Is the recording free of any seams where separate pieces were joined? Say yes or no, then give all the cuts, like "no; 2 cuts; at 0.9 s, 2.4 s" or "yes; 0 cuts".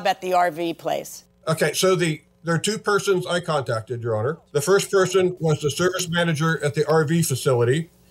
no; 1 cut; at 4.5 s